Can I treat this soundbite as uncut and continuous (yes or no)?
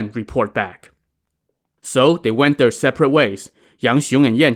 yes